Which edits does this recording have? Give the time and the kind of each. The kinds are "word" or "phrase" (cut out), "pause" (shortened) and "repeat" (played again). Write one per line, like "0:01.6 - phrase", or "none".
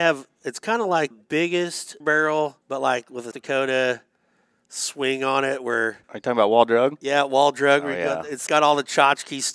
0:01.1 - word
0:02.0 - word
0:02.6 - pause
0:03.3 - word
0:06.0 - pause
0:08.5 - word